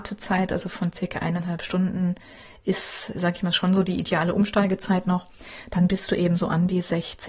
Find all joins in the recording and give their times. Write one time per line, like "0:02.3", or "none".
none